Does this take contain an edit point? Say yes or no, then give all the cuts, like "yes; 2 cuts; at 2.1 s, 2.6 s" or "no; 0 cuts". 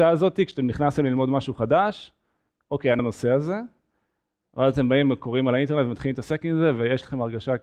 yes; 1 cut; at 3.0 s